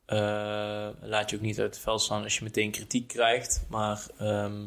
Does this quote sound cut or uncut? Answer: uncut